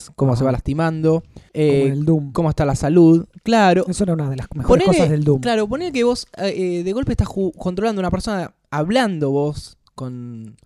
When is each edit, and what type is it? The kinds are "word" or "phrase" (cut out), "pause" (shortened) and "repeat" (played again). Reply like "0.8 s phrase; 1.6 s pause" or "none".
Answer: 1.5 s pause